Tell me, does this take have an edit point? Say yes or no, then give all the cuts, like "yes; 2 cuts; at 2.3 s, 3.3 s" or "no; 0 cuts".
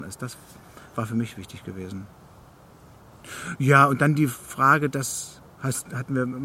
yes; 1 cut; at 5.5 s